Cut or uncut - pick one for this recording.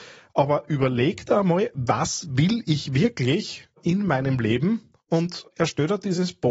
uncut